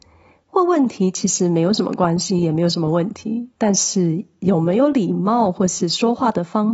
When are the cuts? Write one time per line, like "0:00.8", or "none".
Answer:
0:03.5